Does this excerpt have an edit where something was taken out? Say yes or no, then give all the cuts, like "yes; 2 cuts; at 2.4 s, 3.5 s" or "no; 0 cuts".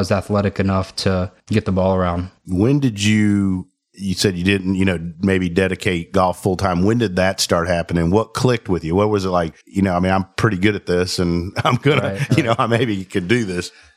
yes; 3 cuts; at 1.4 s, 2.4 s, 9.6 s